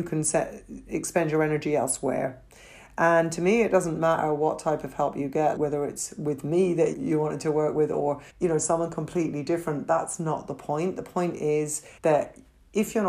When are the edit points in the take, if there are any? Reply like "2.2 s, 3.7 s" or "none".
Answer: 5.6 s, 6.9 s, 8.3 s, 12.0 s

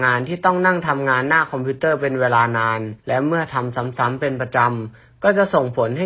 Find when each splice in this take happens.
3.0 s

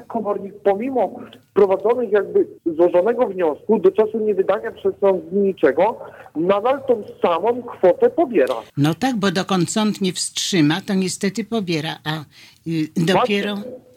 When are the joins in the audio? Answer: 2.6 s, 8.7 s

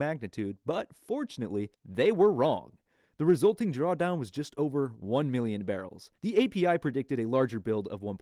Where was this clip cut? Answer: 1.7 s, 6.2 s

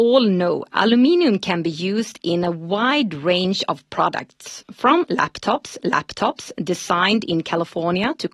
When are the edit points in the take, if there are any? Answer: 5.8 s

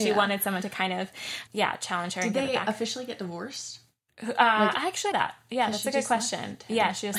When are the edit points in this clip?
1.5 s, 4.7 s, 5.1 s

